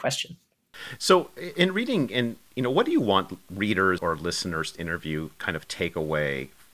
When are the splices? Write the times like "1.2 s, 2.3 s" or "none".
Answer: 4.0 s, 4.7 s